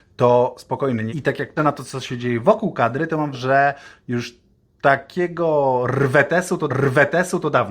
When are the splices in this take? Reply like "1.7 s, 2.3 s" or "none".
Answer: 1.1 s, 1.6 s, 3.3 s, 6.7 s